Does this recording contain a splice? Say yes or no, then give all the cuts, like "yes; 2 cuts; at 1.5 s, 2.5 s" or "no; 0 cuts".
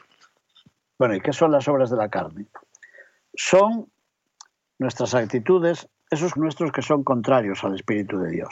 yes; 1 cut; at 6.4 s